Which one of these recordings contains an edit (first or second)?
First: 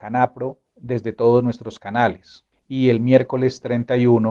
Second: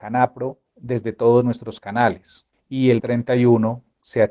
second